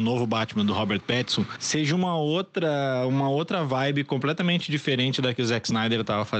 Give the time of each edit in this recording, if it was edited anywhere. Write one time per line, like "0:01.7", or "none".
none

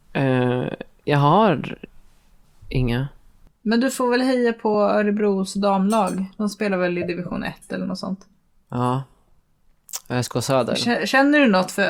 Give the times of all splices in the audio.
none

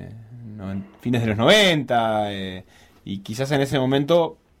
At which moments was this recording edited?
none

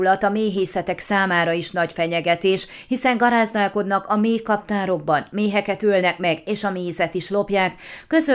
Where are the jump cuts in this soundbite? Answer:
none

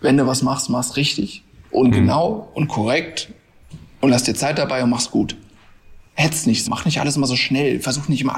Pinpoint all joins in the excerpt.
0:06.6

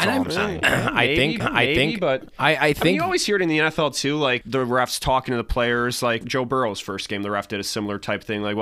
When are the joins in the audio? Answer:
0:01.4
0:04.4
0:06.2

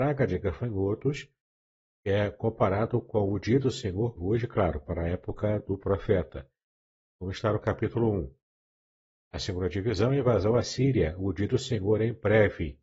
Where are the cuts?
0:04.2

